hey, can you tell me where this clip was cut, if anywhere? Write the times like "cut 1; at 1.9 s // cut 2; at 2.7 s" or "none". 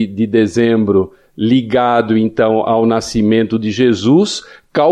none